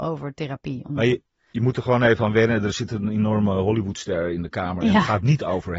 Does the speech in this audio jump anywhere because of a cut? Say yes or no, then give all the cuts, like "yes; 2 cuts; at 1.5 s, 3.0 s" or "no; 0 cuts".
no; 0 cuts